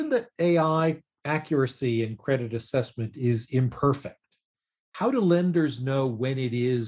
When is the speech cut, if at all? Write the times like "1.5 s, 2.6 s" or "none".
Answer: none